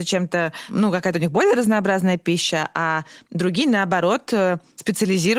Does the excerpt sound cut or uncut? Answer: uncut